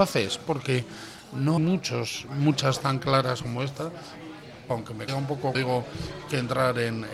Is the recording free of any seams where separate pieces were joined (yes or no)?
no